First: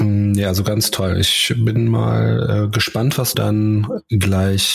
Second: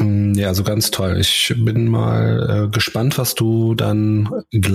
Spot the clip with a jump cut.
first; 1 cut; at 3.3 s

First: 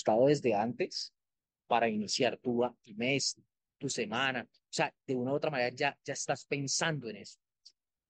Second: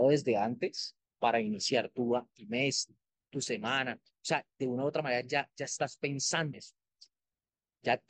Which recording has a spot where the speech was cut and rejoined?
second; 2 cuts; at 1.1 s, 6.5 s

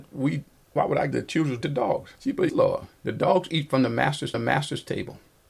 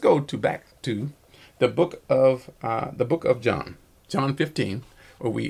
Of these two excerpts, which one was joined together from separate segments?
first; 6 cuts; at 1.1 s, 1.6 s, 2.1 s, 2.5 s, 3.0 s, 4.3 s

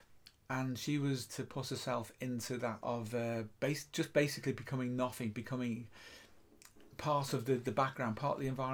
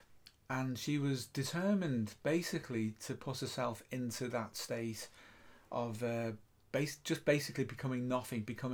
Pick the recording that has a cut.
first; 3 cuts; at 1.3 s, 2.8 s, 3.6 s

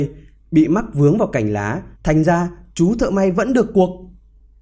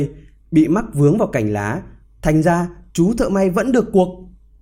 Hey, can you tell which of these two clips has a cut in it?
first; 1 cut; at 2.0 s

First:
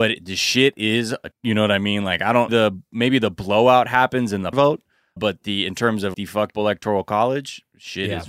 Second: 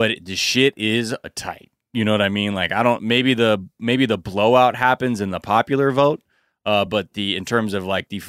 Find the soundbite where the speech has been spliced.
first; 6 cuts; at 1.3 s, 2.5 s, 4.5 s, 5.2 s, 6.1 s, 6.5 s

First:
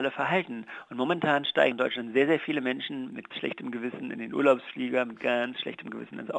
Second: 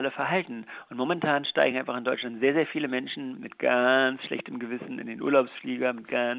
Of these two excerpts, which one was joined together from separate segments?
first; 2 cuts; at 1.7 s, 3.3 s

